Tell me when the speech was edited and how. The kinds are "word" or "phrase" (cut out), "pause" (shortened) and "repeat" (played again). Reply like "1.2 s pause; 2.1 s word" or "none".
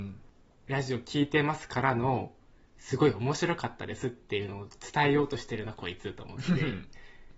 none